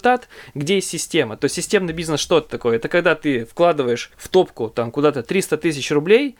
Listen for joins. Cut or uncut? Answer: cut